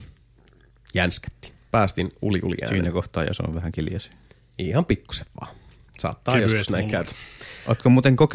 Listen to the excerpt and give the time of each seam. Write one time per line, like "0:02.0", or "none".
none